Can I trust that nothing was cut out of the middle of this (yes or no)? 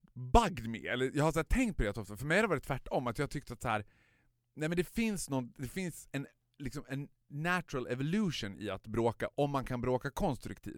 yes